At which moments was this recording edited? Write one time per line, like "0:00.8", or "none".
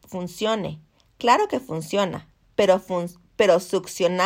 none